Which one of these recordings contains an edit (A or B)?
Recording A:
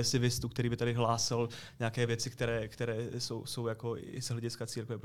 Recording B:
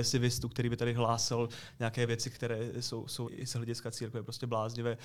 B